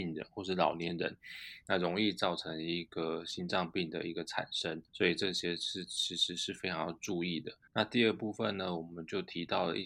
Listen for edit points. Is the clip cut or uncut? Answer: cut